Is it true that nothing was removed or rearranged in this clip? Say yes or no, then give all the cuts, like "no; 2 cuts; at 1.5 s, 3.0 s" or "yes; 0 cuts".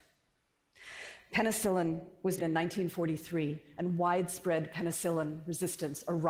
no; 1 cut; at 2.4 s